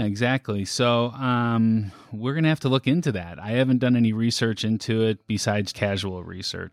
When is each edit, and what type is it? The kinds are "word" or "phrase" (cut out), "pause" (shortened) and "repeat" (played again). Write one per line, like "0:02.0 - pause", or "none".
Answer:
0:05.7 - word